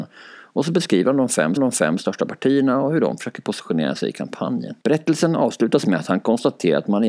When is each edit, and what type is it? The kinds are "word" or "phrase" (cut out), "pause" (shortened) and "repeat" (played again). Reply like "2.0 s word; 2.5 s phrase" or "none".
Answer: 1.6 s repeat; 4.8 s pause